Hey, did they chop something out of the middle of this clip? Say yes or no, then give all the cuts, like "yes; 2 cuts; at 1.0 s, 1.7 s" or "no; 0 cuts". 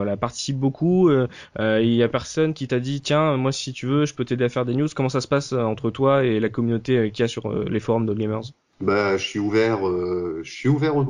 no; 0 cuts